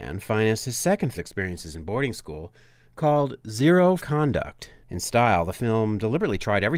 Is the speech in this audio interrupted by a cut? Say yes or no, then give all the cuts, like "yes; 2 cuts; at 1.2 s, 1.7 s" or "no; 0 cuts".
yes; 3 cuts; at 1.1 s, 4.0 s, 4.8 s